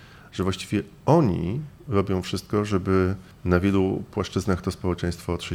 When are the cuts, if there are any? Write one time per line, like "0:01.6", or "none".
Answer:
0:03.3